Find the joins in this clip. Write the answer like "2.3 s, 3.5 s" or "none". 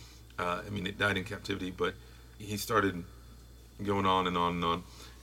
2.4 s